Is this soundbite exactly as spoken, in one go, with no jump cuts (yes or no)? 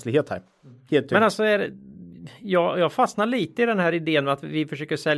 yes